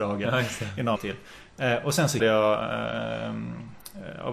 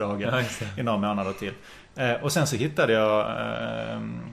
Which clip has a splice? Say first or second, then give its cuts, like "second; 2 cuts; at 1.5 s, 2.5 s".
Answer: first; 2 cuts; at 1.0 s, 2.2 s